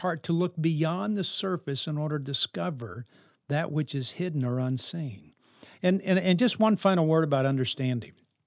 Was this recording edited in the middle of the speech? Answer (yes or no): no